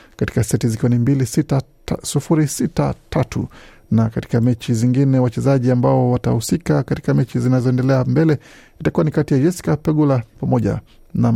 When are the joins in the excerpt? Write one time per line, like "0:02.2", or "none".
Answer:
none